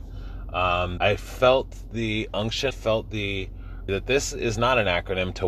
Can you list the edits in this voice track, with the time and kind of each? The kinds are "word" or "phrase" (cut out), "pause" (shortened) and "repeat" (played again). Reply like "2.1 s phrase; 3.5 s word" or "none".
1.0 s word; 2.7 s word; 3.9 s word